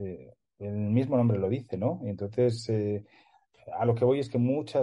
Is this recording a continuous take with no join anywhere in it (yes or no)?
yes